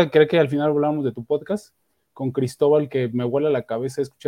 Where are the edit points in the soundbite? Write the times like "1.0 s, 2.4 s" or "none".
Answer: none